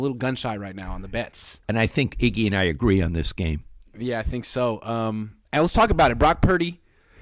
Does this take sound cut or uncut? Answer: cut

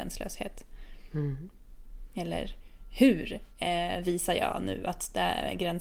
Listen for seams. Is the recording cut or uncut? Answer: uncut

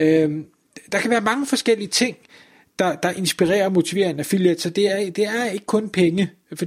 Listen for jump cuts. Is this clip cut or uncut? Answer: uncut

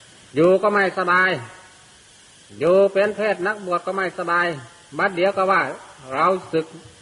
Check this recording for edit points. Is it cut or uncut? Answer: uncut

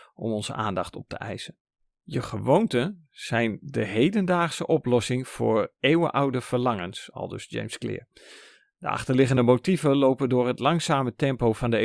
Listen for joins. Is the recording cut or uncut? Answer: uncut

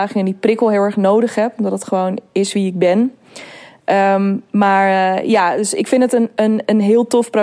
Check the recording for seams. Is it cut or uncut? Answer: uncut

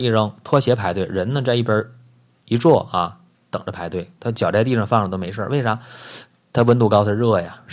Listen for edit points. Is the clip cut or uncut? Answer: uncut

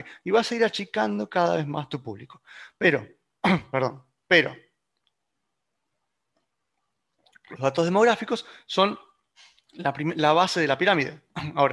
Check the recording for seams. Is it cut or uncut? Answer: uncut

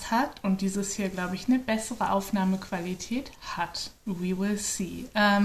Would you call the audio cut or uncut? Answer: uncut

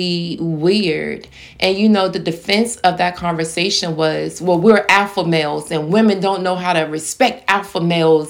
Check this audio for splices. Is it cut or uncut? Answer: uncut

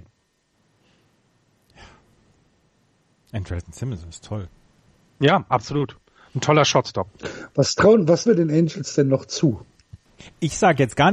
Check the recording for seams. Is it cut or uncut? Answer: cut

